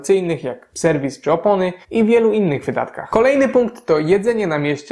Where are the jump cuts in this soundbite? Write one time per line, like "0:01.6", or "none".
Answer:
0:01.8